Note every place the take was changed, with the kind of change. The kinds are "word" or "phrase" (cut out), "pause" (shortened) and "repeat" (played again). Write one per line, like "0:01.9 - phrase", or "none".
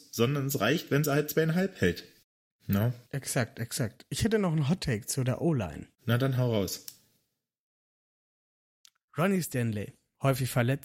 0:02.2 - pause
0:03.1 - pause
0:05.9 - pause